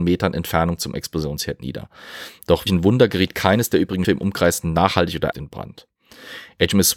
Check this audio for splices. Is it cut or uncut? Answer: cut